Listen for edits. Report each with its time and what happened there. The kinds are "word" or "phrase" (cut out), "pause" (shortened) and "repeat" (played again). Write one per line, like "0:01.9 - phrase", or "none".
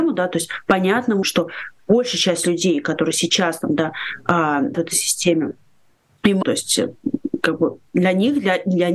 0:01.2 - word
0:04.7 - word
0:06.4 - word
0:07.9 - pause

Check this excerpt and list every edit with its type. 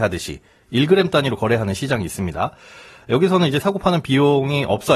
0:03.6 - word

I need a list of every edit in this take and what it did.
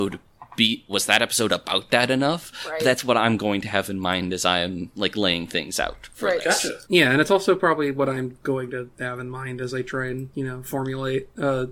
0:06.8 - pause

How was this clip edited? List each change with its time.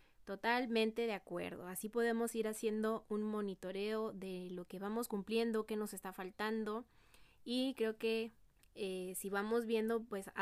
0:07.3 - pause
0:08.5 - pause

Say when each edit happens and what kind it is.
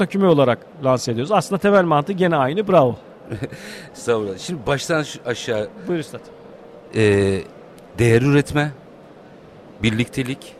none

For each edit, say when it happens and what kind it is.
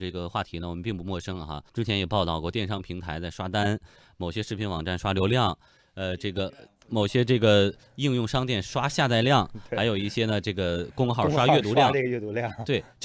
0:01.7 - pause

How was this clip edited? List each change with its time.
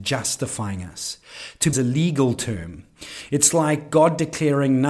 0:01.7 - phrase

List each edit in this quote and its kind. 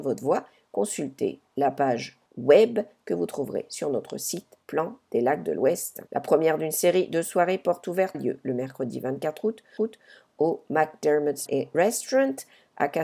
0:02.3 - pause
0:04.6 - pause
0:06.1 - pause
0:08.1 - word
0:09.8 - repeat
0:11.5 - word

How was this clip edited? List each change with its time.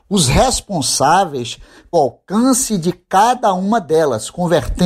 0:01.9 - word

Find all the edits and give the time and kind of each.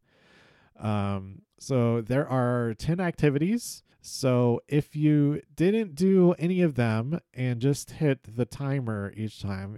0:01.5 - pause
0:03.9 - pause

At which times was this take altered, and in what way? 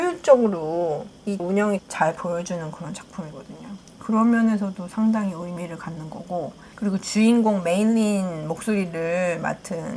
0:01.4 - word
0:01.8 - word

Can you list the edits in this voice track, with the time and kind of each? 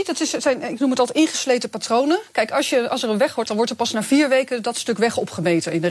0:03.4 - word

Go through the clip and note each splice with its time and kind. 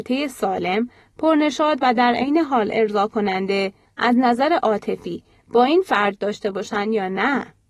none

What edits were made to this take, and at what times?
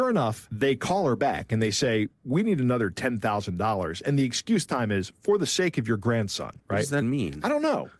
0:04.7 - word
0:06.6 - pause
0:07.0 - word

